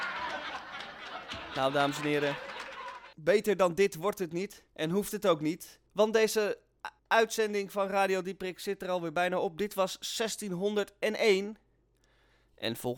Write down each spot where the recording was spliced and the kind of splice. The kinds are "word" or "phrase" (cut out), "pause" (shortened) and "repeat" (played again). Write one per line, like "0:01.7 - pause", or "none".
0:03.1 - pause
0:04.7 - pause
0:05.9 - pause
0:07.0 - pause

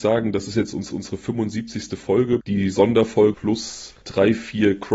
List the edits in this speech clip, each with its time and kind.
0:00.9 - repeat
0:02.4 - word
0:03.3 - word
0:04.0 - pause

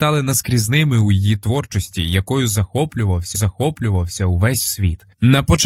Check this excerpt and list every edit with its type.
0:03.3 - repeat

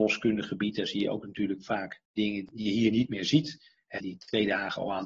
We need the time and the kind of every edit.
0:02.0 - pause
0:04.0 - word

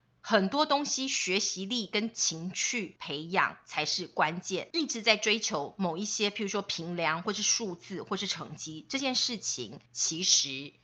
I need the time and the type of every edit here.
0:04.7 - pause
0:09.9 - pause

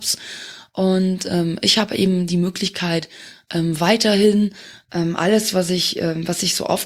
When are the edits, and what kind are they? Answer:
none

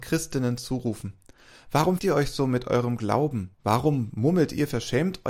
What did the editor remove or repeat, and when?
0:02.0 - word
0:03.5 - pause

